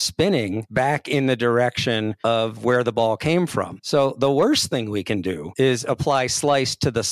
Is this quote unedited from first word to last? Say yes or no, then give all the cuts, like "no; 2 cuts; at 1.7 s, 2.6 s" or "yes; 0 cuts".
yes; 0 cuts